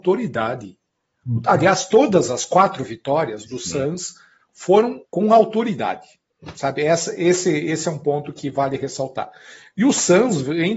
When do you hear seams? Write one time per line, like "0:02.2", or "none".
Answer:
0:05.0